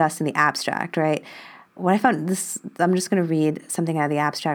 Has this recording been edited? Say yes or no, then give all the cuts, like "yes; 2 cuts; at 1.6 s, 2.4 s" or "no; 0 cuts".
no; 0 cuts